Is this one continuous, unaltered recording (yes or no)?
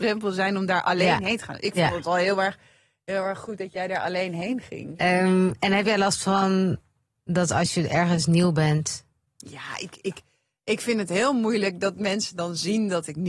yes